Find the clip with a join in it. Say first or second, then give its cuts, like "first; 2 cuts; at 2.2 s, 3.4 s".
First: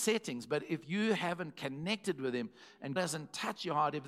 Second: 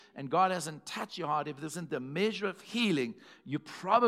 first; 1 cut; at 3.0 s